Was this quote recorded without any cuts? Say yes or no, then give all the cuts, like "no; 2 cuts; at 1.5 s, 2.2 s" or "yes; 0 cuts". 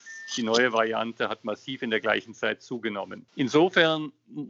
yes; 0 cuts